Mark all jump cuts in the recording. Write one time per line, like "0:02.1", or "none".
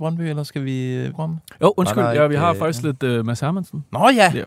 0:01.1